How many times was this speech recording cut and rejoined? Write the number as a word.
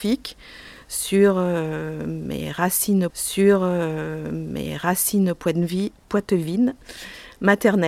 one